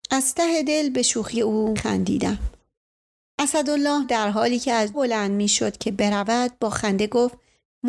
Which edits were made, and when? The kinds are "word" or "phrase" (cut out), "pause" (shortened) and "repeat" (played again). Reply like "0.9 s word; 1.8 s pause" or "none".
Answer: 1.3 s word; 1.8 s word; 4.0 s word; 4.9 s word